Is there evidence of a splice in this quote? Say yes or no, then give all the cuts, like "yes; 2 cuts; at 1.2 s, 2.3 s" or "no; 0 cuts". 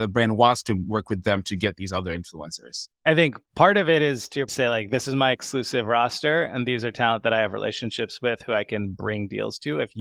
yes; 1 cut; at 4.5 s